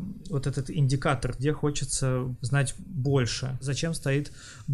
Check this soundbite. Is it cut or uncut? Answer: uncut